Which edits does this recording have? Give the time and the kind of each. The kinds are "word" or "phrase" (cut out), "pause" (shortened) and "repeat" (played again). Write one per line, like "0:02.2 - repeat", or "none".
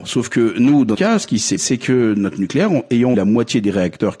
0:00.9 - word
0:01.6 - word
0:03.1 - word

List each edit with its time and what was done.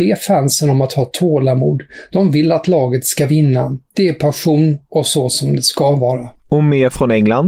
0:06.4 - pause

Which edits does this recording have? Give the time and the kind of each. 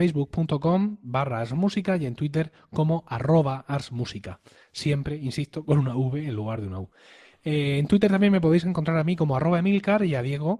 none

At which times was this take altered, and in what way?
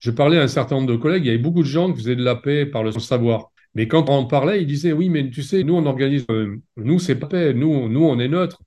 0:02.9 - phrase
0:04.1 - phrase
0:05.6 - word
0:06.3 - phrase
0:07.2 - word

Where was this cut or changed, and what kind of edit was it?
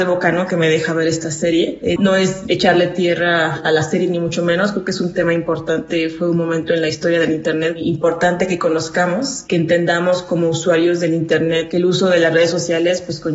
0:02.0 - word

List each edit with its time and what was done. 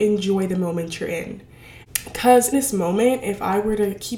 0:02.5 - word

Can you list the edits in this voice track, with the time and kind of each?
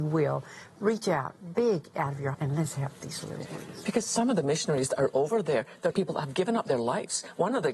0:02.3 - word
0:05.9 - word

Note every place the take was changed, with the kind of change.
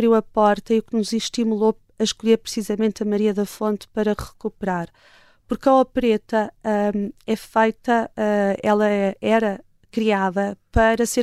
none

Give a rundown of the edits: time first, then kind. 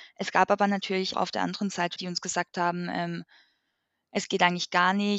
0:01.1 - word
0:02.0 - word

